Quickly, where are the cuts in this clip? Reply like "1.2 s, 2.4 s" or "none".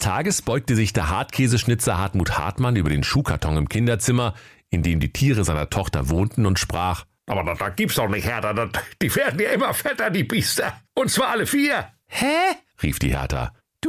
none